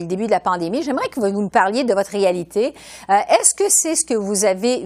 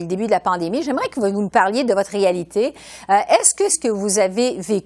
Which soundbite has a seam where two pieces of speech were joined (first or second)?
second